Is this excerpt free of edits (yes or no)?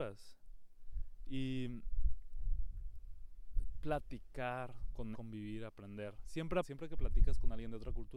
no